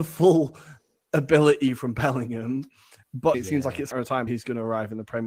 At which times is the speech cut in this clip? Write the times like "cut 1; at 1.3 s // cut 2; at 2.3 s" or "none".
cut 1; at 3.3 s // cut 2; at 3.9 s // cut 3; at 4.3 s